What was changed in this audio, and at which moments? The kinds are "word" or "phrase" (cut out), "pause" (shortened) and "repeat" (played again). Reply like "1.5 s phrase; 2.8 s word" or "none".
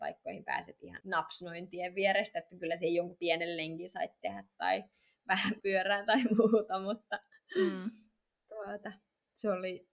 1.0 s word; 5.6 s word